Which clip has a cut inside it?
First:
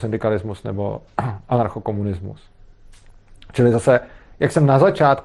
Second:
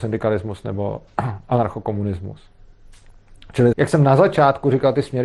second; 1 cut; at 3.7 s

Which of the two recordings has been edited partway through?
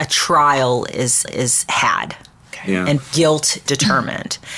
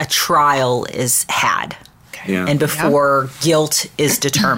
first; 3 cuts; at 1.3 s, 3.0 s, 3.7 s

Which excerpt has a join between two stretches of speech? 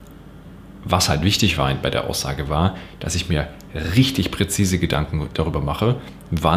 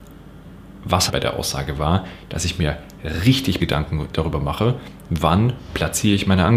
second; 2 cuts; at 1.1 s, 3.6 s

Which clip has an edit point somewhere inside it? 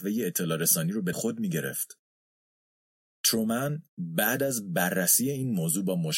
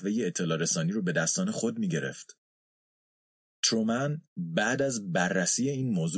first; 1 cut; at 1.1 s

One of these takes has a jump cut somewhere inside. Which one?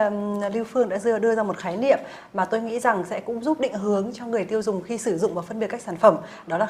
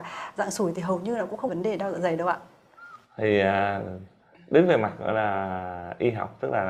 second; 1 cut; at 1.5 s

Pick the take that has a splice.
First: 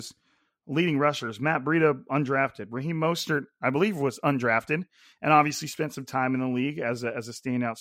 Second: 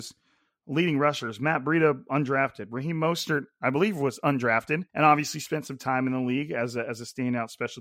second; 1 cut; at 4.9 s

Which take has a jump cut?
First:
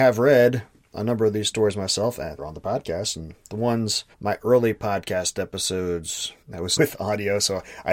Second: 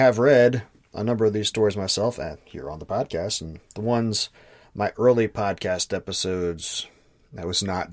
first; 4 cuts; at 2.4 s, 4.1 s, 6.4 s, 6.8 s

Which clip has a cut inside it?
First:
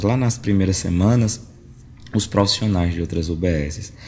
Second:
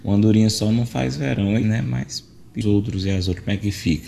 second; 2 cuts; at 1.6 s, 2.6 s

